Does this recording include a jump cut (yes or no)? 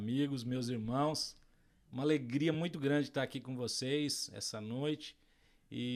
no